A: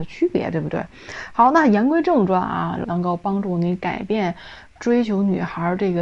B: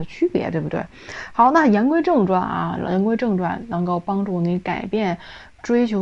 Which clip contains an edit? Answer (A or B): A